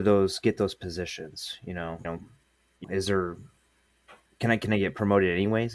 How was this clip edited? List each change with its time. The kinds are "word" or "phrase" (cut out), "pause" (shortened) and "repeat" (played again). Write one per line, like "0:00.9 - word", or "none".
0:02.0 - word
0:02.8 - word